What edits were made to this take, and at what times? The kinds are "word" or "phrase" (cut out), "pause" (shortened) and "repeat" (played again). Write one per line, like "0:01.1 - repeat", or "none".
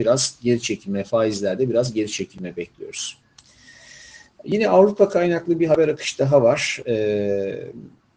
none